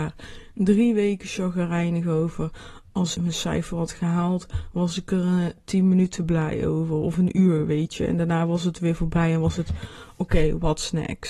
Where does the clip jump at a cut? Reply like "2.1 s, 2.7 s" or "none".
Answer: 3.1 s